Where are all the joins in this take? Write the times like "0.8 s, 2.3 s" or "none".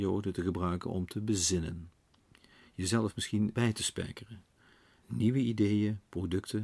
3.5 s, 5.0 s